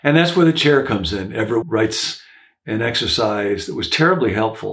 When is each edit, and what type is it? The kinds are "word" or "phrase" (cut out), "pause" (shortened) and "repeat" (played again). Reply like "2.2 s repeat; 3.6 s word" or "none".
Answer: 1.6 s word